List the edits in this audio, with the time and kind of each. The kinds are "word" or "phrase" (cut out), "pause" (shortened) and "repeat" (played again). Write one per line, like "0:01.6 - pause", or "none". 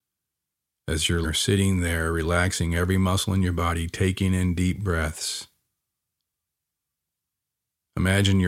0:01.2 - word